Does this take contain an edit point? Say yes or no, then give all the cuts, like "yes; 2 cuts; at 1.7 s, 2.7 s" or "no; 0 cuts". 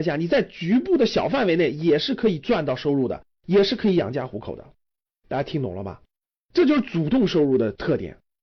no; 0 cuts